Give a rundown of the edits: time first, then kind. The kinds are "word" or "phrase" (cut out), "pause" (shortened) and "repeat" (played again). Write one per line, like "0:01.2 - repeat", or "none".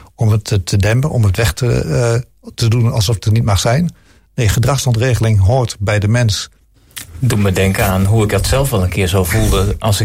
none

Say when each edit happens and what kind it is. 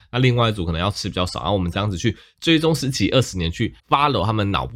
0:03.8 - pause

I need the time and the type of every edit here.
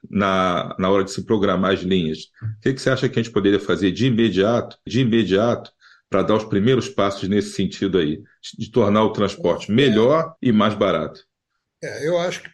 0:04.9 - repeat
0:10.4 - pause

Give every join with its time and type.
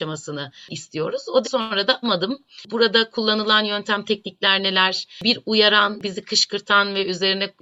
0:01.4 - word
0:02.0 - word

